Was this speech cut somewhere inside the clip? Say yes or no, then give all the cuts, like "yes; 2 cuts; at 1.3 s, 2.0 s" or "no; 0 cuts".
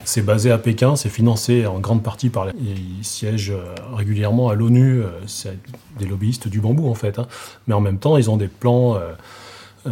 yes; 1 cut; at 2.5 s